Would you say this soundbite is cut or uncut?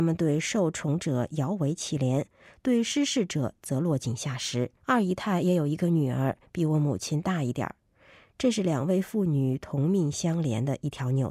cut